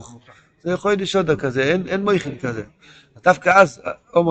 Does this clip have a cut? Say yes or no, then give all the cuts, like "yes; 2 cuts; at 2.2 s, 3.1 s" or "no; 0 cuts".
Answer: no; 0 cuts